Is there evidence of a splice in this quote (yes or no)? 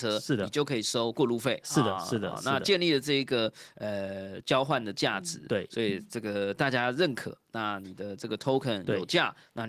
no